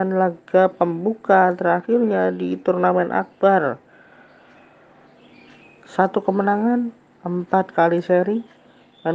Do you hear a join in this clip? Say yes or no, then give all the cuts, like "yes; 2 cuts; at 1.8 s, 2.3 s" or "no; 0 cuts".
no; 0 cuts